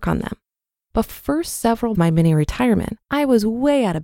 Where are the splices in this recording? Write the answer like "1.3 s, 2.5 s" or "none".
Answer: 1.1 s, 1.9 s, 3.0 s